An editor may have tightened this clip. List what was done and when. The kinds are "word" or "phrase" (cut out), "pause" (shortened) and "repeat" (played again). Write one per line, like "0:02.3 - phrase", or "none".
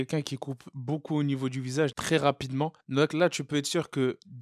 0:01.9 - phrase
0:02.8 - pause